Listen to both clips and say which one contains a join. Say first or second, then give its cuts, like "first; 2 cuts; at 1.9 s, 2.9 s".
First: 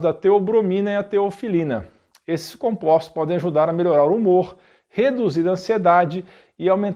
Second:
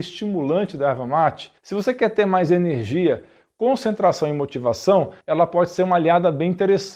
second; 2 cuts; at 1.6 s, 5.2 s